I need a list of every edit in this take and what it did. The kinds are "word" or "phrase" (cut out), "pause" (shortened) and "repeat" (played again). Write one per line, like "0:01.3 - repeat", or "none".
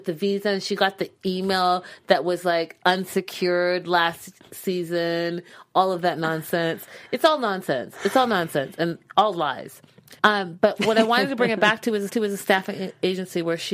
0:10.2 - pause
0:12.1 - repeat